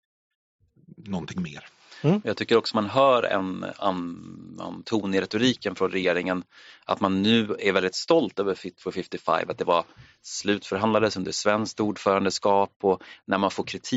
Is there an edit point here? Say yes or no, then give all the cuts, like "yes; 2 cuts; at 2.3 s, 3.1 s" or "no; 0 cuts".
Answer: no; 0 cuts